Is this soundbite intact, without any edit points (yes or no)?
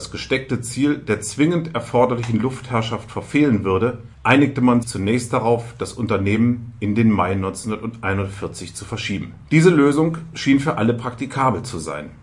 no